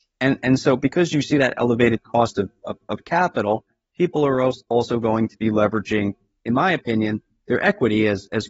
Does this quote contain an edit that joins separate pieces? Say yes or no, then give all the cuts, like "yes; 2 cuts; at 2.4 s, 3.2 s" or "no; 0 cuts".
no; 0 cuts